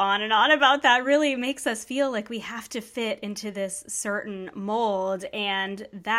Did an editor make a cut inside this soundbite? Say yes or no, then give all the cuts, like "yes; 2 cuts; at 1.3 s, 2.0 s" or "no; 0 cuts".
no; 0 cuts